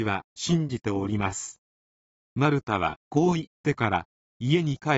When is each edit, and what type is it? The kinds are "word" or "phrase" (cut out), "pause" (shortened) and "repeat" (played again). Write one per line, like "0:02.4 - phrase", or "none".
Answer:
0:03.0 - pause